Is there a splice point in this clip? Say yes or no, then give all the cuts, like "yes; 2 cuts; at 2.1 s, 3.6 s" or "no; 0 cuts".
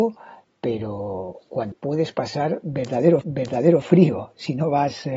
yes; 2 cuts; at 1.7 s, 3.2 s